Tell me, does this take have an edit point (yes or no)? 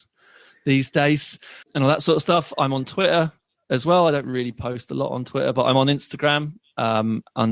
yes